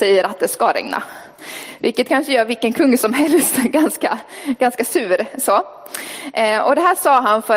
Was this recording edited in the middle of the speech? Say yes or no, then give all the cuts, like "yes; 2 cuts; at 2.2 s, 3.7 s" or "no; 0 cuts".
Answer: no; 0 cuts